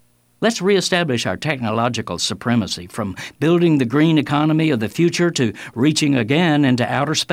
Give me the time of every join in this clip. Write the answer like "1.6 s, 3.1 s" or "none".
none